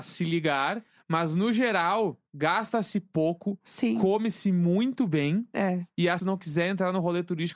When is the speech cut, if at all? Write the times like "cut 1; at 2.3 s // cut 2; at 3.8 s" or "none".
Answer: cut 1; at 0.9 s // cut 2; at 2.3 s // cut 3; at 6.2 s

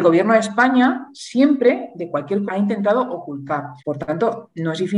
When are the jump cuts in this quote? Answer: cut 1; at 2.5 s // cut 2; at 3.8 s

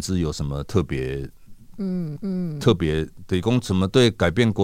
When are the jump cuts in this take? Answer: cut 1; at 2.2 s

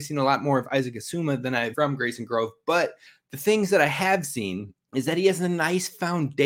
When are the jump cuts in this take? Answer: cut 1; at 1.7 s // cut 2; at 3.1 s // cut 3; at 4.8 s

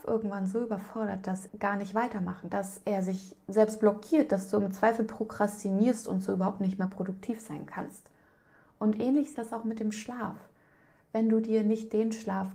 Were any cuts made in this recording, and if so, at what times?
cut 1; at 1.5 s // cut 2; at 2.5 s // cut 3; at 9.3 s

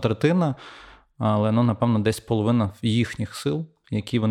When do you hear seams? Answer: none

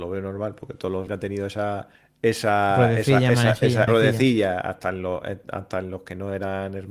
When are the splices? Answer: cut 1; at 1.1 s // cut 2; at 2.0 s // cut 3; at 3.9 s

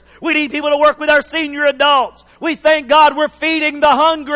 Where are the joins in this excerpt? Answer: none

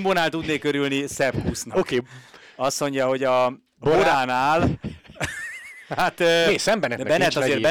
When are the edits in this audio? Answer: none

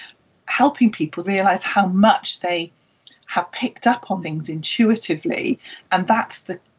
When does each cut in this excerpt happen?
cut 1; at 1.2 s // cut 2; at 4.2 s

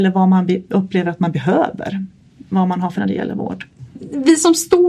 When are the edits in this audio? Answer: cut 1; at 3.0 s

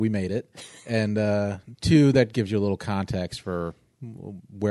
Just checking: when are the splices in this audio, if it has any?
cut 1; at 2.3 s

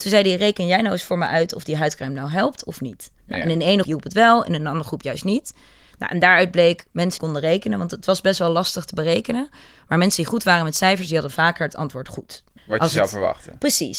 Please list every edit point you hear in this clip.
cut 1; at 3.2 s // cut 2; at 3.8 s // cut 3; at 7.2 s // cut 4; at 12.6 s

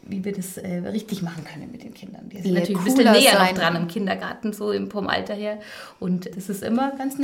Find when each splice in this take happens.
cut 1; at 6.3 s

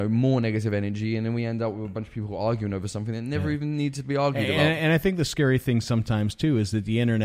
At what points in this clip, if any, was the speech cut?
none

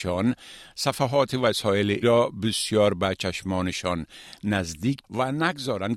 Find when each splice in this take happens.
cut 1; at 2.0 s // cut 2; at 5.0 s

